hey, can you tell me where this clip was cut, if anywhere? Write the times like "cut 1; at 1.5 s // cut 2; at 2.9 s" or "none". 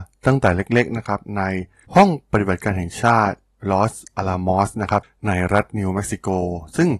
none